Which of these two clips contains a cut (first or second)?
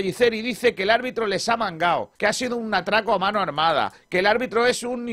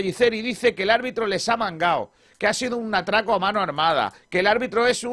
first